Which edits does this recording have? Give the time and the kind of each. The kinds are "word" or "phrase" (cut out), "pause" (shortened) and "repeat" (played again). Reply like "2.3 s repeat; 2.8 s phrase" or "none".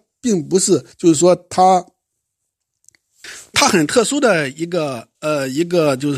0.9 s pause; 3.5 s word; 5.1 s pause